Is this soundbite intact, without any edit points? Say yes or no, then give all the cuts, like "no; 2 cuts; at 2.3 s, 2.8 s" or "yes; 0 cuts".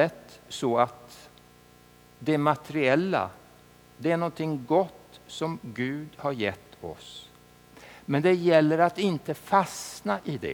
yes; 0 cuts